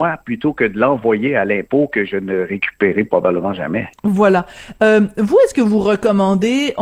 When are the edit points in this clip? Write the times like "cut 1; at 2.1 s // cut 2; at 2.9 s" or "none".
cut 1; at 3.9 s